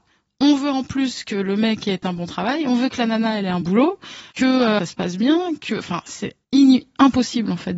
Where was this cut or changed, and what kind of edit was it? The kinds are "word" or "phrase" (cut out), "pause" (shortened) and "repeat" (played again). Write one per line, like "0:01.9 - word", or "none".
0:03.6 - word
0:04.3 - pause
0:04.8 - phrase
0:06.4 - pause